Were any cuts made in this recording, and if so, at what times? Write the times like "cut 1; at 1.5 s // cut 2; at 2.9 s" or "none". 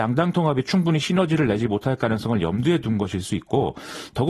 none